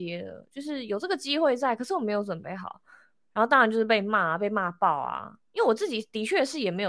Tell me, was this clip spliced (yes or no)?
no